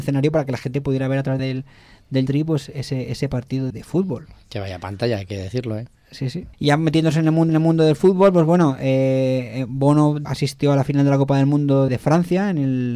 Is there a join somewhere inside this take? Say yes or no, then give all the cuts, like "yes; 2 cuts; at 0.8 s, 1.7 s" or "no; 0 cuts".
yes; 7 cuts; at 1.4 s, 2.3 s, 3.7 s, 6.5 s, 7.5 s, 10.2 s, 11.9 s